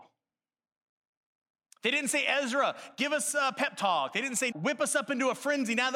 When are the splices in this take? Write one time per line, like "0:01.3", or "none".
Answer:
0:04.5